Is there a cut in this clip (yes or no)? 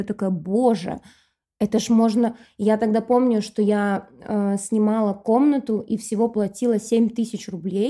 no